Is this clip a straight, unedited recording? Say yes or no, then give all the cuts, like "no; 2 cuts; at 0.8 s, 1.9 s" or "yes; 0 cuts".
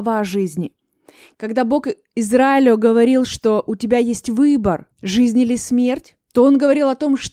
no; 1 cut; at 4.9 s